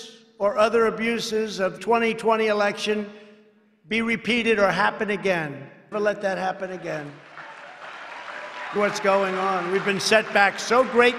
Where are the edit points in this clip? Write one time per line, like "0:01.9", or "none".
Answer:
0:01.8
0:05.9
0:08.8

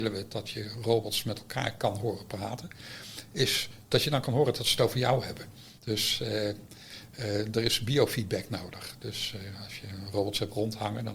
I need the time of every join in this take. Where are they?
0:05.8

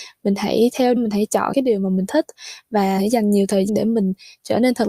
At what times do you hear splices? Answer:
0:01.0
0:01.5
0:03.0
0:03.7

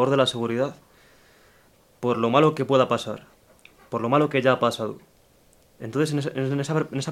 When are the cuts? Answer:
none

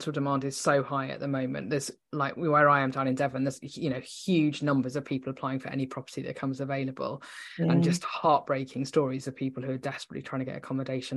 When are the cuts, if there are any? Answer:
none

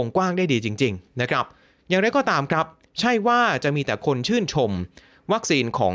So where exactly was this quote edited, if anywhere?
none

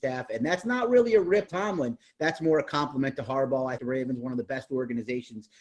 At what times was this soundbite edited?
0:01.5
0:03.8

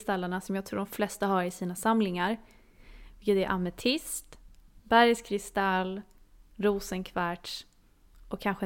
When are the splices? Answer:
none

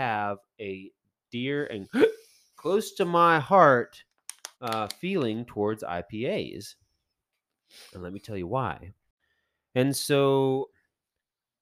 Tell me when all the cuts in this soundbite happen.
0:04.5

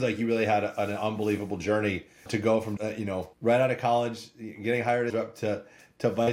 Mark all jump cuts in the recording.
0:02.3
0:02.8
0:03.3
0:05.1

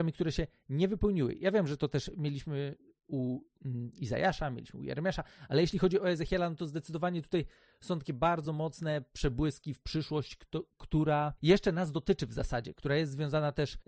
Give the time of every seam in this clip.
none

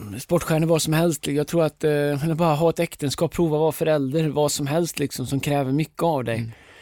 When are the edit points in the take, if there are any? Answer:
none

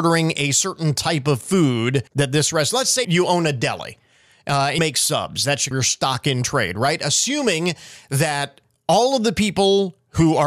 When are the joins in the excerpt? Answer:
0:02.1
0:03.0
0:04.8
0:05.7

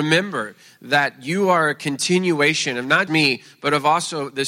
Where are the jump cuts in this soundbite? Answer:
0:03.1

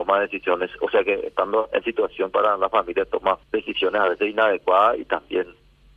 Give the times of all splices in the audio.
0:01.8
0:03.4

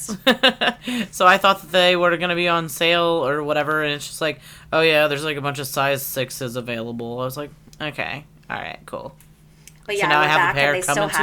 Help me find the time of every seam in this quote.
none

